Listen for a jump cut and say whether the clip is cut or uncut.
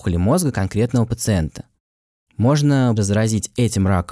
cut